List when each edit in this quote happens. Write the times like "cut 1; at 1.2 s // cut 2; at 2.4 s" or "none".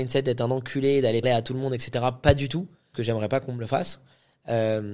cut 1; at 1.2 s // cut 2; at 2.9 s